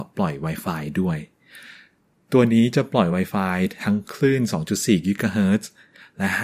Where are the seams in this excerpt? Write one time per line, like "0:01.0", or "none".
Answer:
none